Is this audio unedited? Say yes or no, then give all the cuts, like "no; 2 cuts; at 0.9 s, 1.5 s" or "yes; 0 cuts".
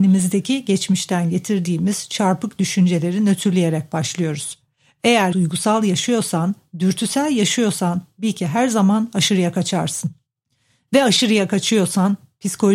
no; 1 cut; at 5.3 s